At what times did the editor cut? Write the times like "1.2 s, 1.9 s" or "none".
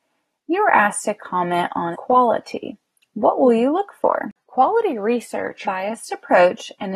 1.9 s, 4.4 s, 5.6 s